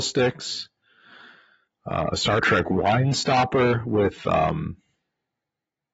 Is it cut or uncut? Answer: uncut